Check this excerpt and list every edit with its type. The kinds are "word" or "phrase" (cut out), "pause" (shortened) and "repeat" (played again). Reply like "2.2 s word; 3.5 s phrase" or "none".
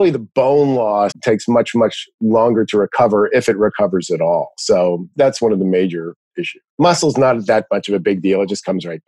1.1 s phrase; 5.1 s word; 6.7 s pause